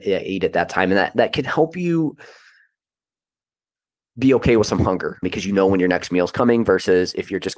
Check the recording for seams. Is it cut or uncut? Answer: uncut